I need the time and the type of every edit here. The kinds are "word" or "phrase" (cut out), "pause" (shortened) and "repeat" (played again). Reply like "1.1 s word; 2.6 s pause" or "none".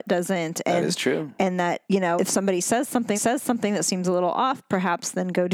1.9 s pause; 2.2 s word; 3.1 s repeat